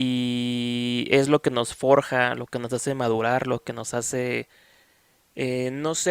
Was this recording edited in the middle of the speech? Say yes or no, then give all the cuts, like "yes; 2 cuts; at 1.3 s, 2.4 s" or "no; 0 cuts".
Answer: no; 0 cuts